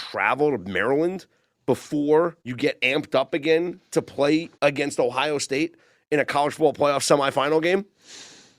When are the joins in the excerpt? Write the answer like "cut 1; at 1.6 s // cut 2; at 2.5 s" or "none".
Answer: cut 1; at 2.4 s // cut 2; at 4.5 s